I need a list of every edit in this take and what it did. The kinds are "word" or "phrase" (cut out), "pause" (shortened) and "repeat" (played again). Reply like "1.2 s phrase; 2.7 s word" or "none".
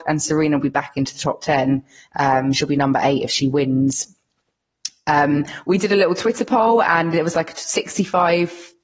2.0 s pause